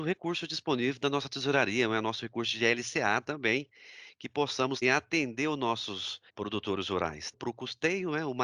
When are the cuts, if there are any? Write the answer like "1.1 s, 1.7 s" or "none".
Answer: 4.8 s, 6.3 s, 7.3 s